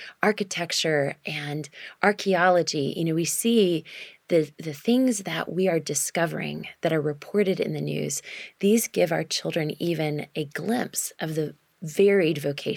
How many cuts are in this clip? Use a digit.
0